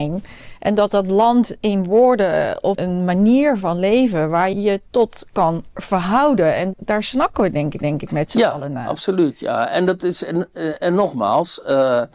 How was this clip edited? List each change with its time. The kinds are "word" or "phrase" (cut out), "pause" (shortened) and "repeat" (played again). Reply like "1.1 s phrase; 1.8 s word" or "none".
2.7 s word; 4.5 s word; 4.9 s pause; 6.7 s word; 7.8 s repeat